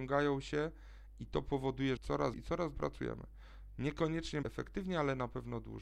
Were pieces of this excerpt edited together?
yes; 4 cuts; at 2.0 s, 2.3 s, 2.7 s, 4.4 s

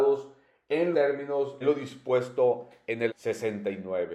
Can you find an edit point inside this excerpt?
yes; 3 cuts; at 0.9 s, 1.6 s, 3.1 s

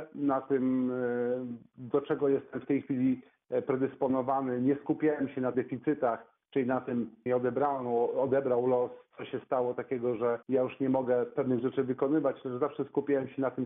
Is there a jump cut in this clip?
yes; 3 cuts; at 5.5 s, 7.3 s, 10.4 s

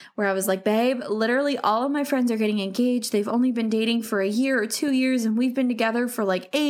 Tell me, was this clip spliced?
no; 0 cuts

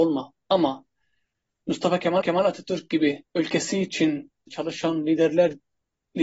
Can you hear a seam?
yes; 3 cuts; at 2.2 s, 3.3 s, 4.5 s

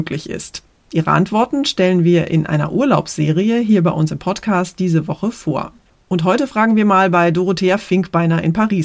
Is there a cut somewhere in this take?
no; 0 cuts

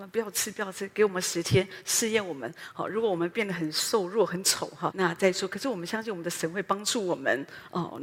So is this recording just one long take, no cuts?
no; 1 cut; at 4.9 s

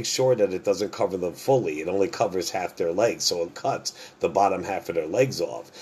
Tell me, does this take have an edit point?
yes; 1 cut; at 3.5 s

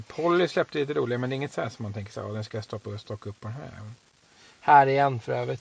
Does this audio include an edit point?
no; 0 cuts

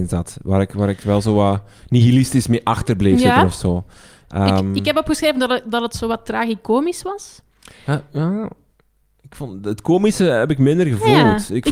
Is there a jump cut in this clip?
no; 0 cuts

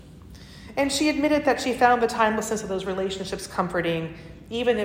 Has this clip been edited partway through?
no; 0 cuts

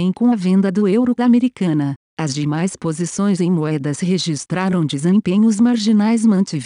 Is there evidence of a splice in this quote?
yes; 1 cut; at 1.2 s

